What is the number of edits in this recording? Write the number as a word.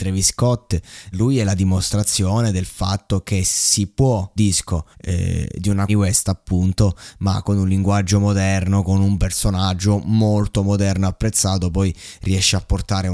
four